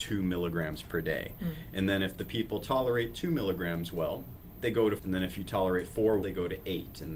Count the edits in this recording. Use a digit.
2